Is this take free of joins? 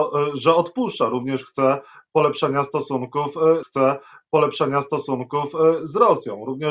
no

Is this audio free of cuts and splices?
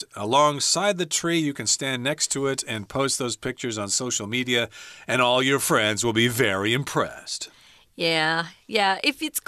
yes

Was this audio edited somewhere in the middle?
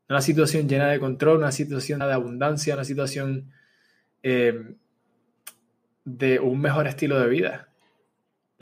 yes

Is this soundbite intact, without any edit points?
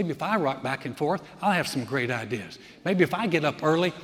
yes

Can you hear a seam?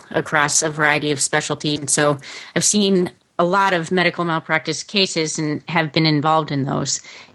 no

